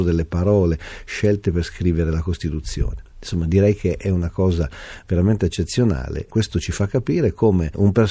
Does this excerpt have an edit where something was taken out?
no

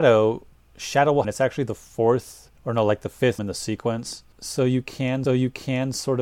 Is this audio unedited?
no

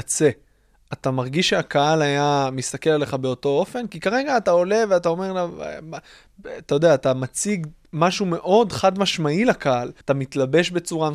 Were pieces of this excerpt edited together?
yes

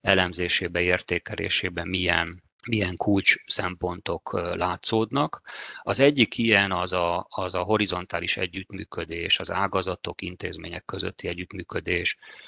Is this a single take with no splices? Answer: yes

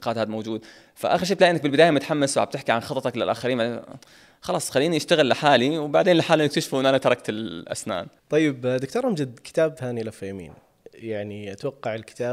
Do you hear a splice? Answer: no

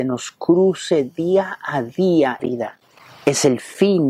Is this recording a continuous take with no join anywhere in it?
no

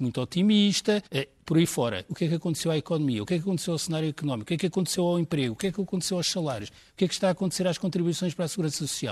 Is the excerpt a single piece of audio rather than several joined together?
no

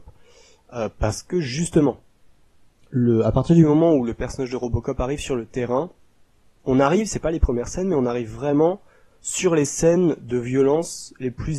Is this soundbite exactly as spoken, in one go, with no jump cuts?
yes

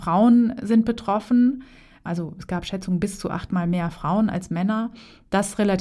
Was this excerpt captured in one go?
yes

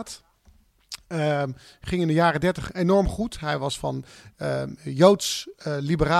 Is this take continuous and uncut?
yes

